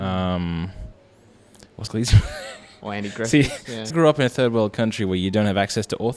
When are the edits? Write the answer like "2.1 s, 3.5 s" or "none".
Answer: 1.9 s, 3.9 s